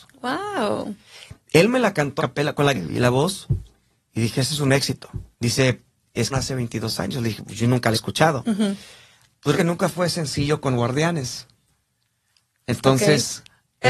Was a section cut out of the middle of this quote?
yes; 6 cuts; at 2.2 s, 2.7 s, 5.3 s, 6.3 s, 7.9 s, 9.5 s

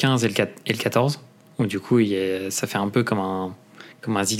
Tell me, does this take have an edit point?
no; 0 cuts

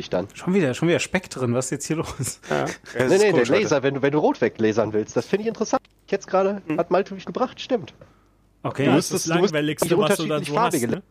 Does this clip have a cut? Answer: yes; 1 cut; at 7.2 s

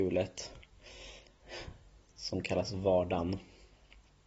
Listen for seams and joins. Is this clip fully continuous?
yes; 0 cuts

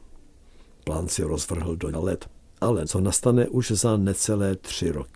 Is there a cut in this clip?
yes; 2 cuts; at 1.9 s, 2.8 s

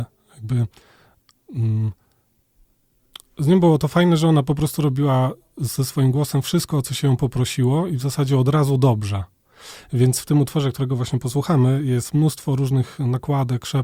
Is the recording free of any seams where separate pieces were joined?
yes; 0 cuts

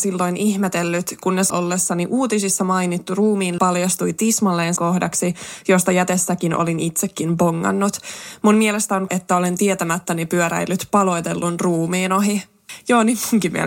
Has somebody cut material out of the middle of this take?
yes; 4 cuts; at 1.5 s, 3.6 s, 4.8 s, 9.1 s

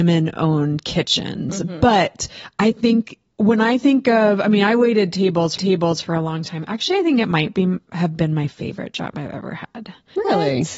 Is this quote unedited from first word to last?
no; 1 cut; at 5.6 s

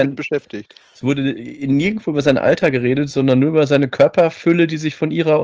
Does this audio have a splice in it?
no; 0 cuts

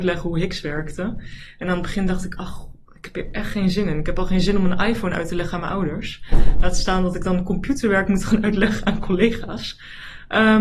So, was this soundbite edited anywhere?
no; 0 cuts

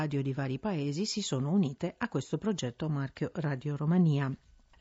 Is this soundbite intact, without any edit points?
yes; 0 cuts

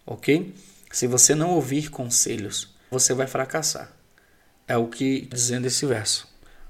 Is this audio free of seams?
no; 2 cuts; at 2.9 s, 5.3 s

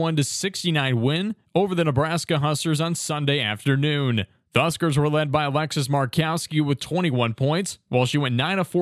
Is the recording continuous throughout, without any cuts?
yes; 0 cuts

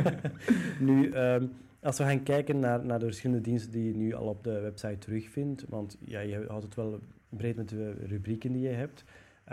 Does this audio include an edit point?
no; 0 cuts

